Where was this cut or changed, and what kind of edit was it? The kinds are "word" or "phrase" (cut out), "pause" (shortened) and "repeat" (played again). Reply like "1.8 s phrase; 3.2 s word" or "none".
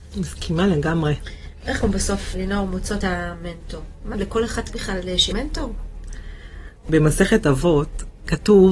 1.8 s word; 2.3 s word; 3.0 s word; 4.1 s word; 4.7 s word; 5.3 s word